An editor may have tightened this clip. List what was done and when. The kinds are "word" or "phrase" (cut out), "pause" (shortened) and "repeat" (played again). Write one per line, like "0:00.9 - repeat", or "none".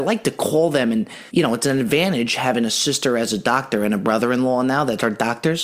0:01.3 - pause